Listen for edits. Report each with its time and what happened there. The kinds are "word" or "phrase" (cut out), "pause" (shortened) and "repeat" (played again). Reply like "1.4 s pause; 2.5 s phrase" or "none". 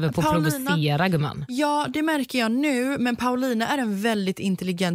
none